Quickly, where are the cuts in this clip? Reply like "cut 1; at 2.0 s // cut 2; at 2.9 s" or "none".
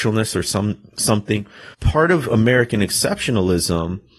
cut 1; at 1.7 s